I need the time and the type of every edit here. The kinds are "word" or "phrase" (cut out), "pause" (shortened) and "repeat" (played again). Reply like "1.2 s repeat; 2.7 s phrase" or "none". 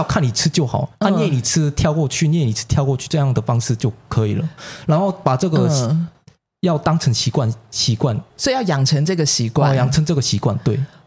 0.9 s pause; 8.3 s pause